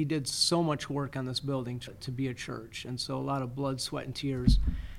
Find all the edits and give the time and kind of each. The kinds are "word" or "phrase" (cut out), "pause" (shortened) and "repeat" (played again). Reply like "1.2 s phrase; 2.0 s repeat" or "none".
1.9 s word